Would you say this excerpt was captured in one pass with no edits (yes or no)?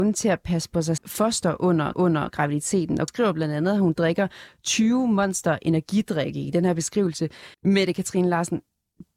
no